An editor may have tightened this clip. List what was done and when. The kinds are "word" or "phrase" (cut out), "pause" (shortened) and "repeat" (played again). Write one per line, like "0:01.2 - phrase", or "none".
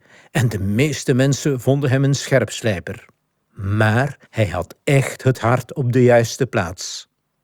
0:04.3 - pause